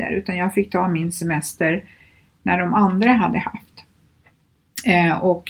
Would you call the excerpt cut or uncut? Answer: uncut